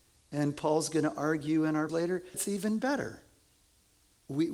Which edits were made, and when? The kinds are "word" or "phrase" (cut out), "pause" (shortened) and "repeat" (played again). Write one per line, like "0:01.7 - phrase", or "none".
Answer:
0:01.9 - word
0:02.3 - word